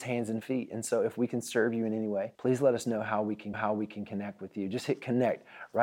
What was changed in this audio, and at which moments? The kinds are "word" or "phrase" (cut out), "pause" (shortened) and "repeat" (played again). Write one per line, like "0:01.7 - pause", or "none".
0:02.4 - pause
0:03.5 - repeat